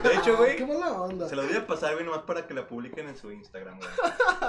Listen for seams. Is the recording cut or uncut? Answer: uncut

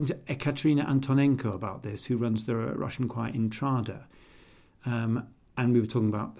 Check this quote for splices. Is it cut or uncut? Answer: uncut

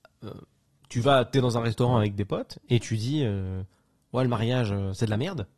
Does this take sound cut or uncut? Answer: uncut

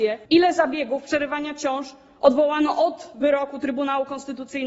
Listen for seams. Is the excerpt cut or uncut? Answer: uncut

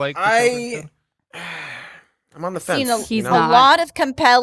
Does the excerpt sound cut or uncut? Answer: uncut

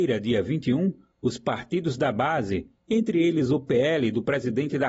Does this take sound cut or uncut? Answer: uncut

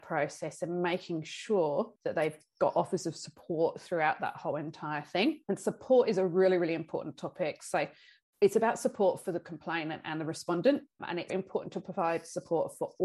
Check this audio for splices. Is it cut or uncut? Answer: cut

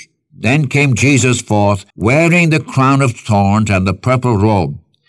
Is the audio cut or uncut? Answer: cut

